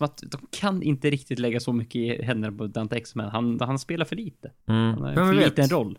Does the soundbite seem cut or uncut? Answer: cut